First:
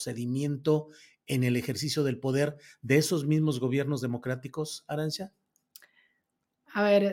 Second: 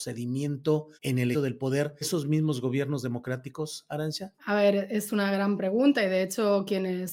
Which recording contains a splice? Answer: second; 4 cuts; at 1.0 s, 1.3 s, 2.0 s, 4.4 s

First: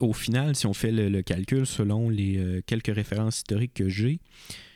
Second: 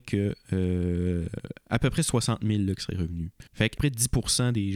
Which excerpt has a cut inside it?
second; 2 cuts; at 3.5 s, 3.8 s

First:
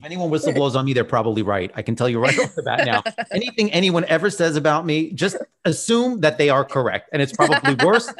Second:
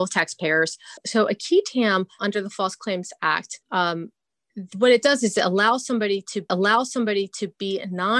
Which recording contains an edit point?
second; 4 cuts; at 1.0 s, 2.2 s, 3.6 s, 6.5 s

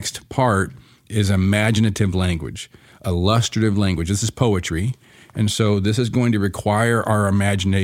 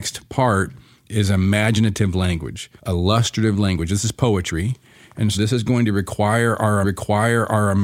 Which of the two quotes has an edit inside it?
second; 3 cuts; at 2.8 s, 5.3 s, 6.8 s

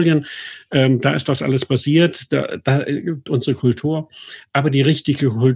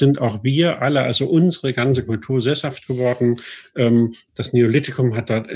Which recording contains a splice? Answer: first; 1 cut; at 3.3 s

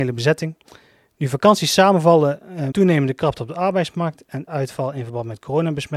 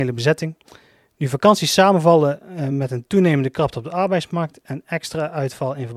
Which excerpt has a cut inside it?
first; 2 cuts; at 2.7 s, 4.5 s

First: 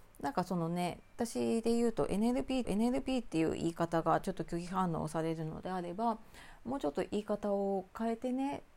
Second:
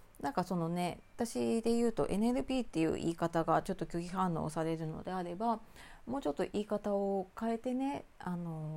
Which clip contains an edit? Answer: first; 1 cut; at 2.6 s

